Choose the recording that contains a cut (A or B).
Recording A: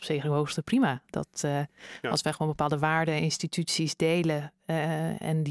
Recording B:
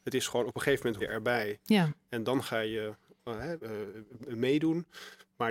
B